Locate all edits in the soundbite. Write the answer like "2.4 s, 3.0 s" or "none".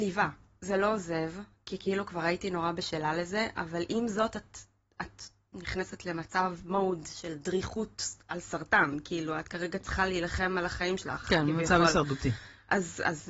none